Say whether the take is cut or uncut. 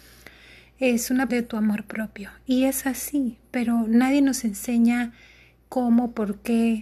cut